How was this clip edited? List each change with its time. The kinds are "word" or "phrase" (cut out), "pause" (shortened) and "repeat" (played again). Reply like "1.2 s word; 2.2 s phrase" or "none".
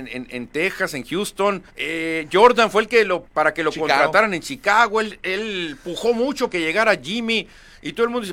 1.7 s pause; 3.2 s word; 6.5 s word

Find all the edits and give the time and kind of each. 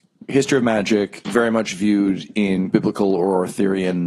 none

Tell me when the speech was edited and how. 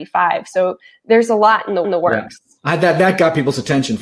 1.8 s repeat

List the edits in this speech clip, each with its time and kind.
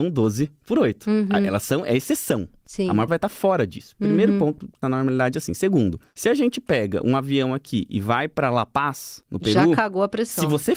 3.1 s phrase; 4.8 s phrase

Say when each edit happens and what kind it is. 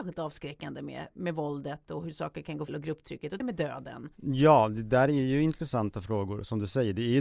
2.7 s word; 3.4 s word

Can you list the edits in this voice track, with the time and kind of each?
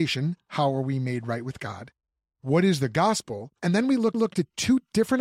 3.5 s pause; 4.1 s repeat

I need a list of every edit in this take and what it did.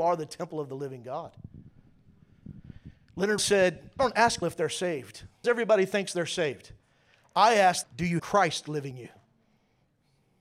3.4 s word; 4.0 s word; 4.4 s word; 5.4 s word; 7.8 s word; 8.2 s word; 8.9 s word

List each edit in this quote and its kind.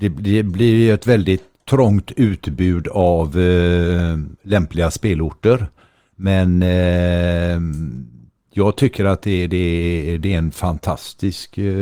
none

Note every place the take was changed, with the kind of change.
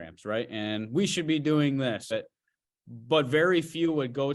2.1 s phrase

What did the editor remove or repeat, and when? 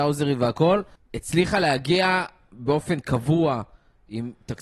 1.0 s pause

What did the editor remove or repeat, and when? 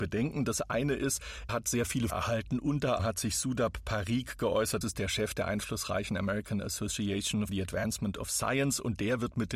1.5 s word; 2.1 s word; 3.0 s word; 4.8 s word; 7.5 s word

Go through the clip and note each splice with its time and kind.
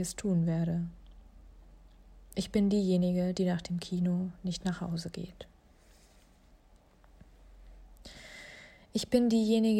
none

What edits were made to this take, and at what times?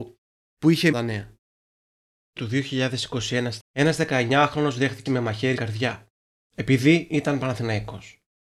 0.9 s phrase; 2.4 s word; 3.6 s word; 5.1 s word; 5.6 s word

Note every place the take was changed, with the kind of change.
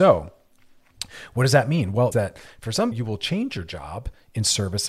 2.1 s word; 2.9 s word

